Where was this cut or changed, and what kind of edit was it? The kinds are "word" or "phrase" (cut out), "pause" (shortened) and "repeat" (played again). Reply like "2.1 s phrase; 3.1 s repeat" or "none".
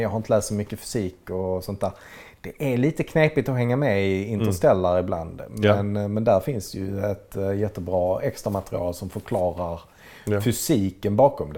none